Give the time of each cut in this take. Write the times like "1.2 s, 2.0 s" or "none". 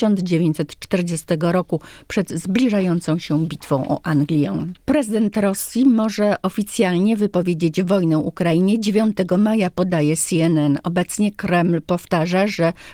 4.8 s